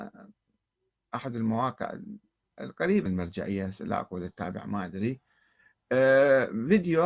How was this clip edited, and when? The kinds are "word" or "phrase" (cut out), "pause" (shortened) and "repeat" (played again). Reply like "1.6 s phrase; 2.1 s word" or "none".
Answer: 3.1 s word